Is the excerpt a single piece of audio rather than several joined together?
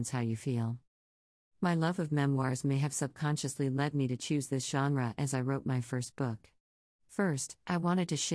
yes; 0 cuts

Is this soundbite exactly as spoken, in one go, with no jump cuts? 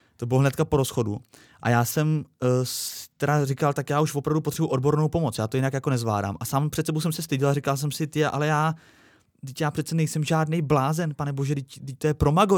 yes; 0 cuts

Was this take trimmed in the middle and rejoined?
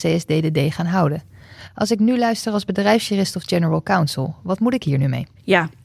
no; 0 cuts

